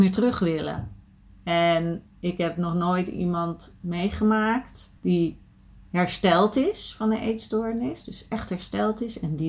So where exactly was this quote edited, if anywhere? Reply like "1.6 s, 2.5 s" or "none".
5.0 s